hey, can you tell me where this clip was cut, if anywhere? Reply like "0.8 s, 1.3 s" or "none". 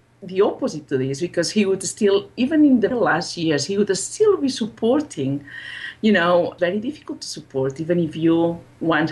2.9 s, 6.6 s